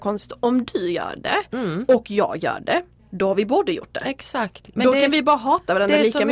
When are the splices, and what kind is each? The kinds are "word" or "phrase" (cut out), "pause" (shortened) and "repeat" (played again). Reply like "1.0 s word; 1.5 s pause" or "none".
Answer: 3.0 s pause